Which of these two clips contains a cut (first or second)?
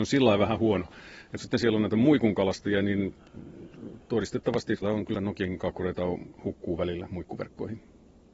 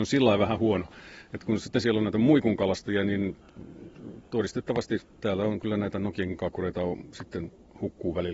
first